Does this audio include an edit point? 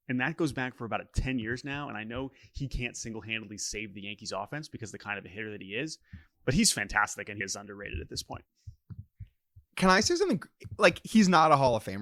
yes; 2 cuts; at 7.4 s, 9.7 s

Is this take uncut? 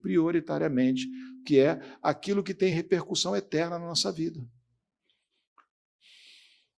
yes; 0 cuts

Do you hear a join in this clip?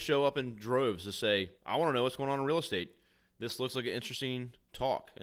yes; 1 cut; at 1.6 s

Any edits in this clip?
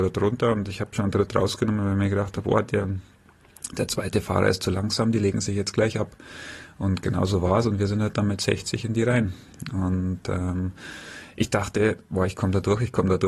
no; 0 cuts

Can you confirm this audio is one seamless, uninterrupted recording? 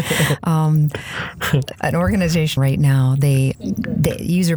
no; 3 cuts; at 1.7 s, 2.6 s, 3.5 s

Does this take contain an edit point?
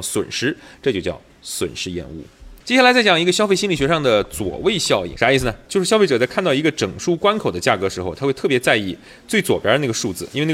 yes; 1 cut; at 2.6 s

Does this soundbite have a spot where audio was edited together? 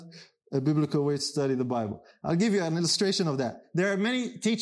no; 0 cuts

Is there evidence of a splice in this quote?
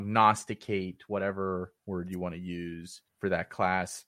yes; 2 cuts; at 1.8 s, 3.1 s

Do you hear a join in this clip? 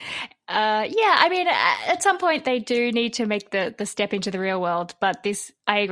no; 0 cuts

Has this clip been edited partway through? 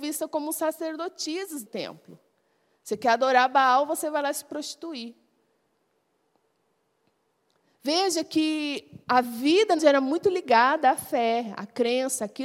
yes; 3 cuts; at 1.6 s, 9.0 s, 9.8 s

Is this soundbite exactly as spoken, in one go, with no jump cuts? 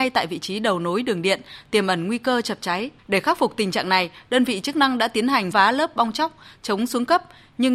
no; 2 cuts; at 3.0 s, 5.5 s

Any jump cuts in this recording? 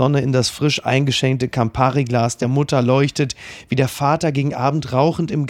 no; 0 cuts

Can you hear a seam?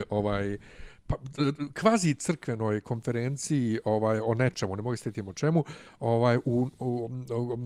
no; 0 cuts

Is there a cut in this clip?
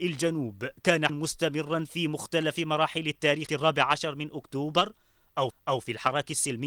yes; 3 cuts; at 1.1 s, 3.5 s, 5.5 s

